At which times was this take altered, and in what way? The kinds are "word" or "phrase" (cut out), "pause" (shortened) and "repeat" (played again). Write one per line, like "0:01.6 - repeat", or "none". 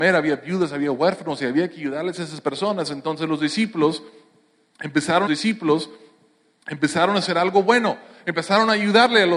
0:05.3 - repeat